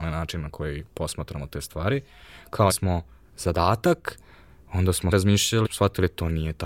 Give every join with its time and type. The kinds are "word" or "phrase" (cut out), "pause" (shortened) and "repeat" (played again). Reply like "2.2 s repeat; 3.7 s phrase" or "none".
2.7 s word; 5.1 s word; 5.6 s word